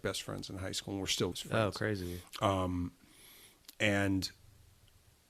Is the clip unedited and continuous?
no; 1 cut; at 1.3 s

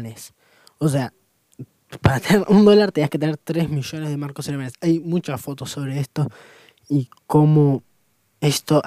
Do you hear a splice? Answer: no; 0 cuts

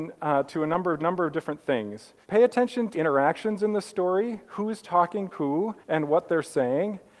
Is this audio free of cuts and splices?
no; 5 cuts; at 1.0 s, 2.2 s, 2.9 s, 5.3 s, 5.8 s

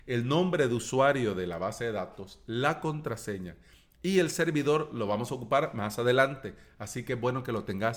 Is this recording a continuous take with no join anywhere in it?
yes; 0 cuts

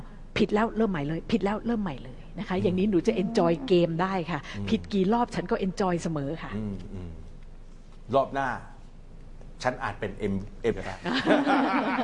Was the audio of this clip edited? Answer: yes; 1 cut; at 10.7 s

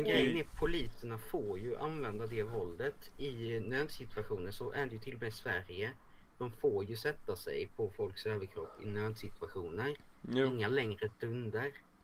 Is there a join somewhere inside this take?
no; 0 cuts

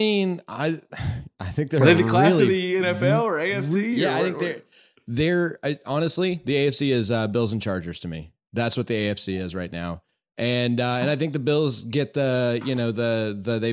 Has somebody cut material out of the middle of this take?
no; 0 cuts

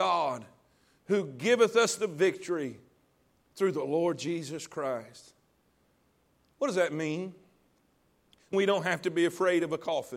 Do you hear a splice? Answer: yes; 1 cut; at 8.5 s

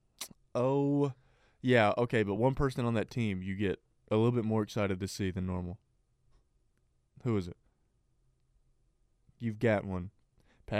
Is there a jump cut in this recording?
no; 0 cuts

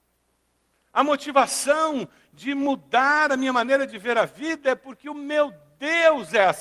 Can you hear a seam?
no; 0 cuts

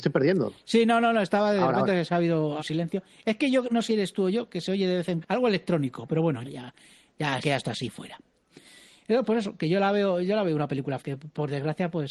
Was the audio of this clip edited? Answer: yes; 6 cuts; at 2.6 s, 3.9 s, 5.2 s, 6.4 s, 7.4 s, 11.0 s

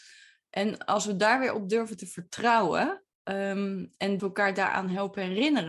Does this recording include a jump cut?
yes; 2 cuts; at 3.1 s, 4.2 s

